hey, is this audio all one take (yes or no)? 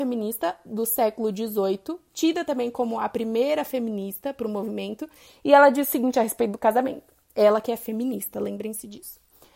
yes